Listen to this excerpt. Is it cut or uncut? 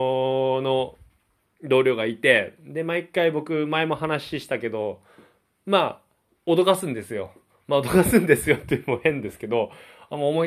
uncut